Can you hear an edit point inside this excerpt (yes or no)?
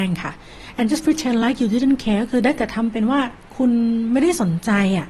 no